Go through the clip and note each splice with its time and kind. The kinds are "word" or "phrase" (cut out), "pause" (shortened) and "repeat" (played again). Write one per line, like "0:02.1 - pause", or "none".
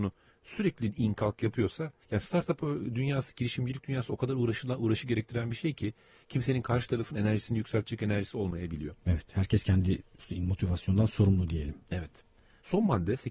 none